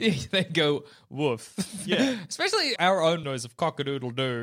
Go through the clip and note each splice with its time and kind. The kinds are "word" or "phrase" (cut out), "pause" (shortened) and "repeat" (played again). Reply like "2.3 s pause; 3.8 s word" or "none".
2.8 s word; 3.2 s word